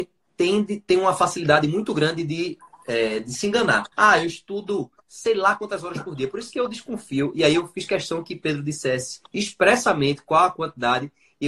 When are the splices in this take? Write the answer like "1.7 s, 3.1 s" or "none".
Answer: 3.9 s, 9.3 s